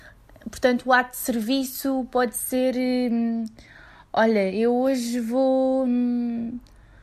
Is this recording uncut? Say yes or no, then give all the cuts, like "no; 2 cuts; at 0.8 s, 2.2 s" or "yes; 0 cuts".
yes; 0 cuts